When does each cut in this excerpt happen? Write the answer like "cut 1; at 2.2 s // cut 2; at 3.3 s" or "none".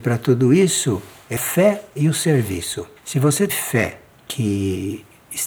cut 1; at 1.4 s // cut 2; at 3.0 s // cut 3; at 3.5 s // cut 4; at 4.1 s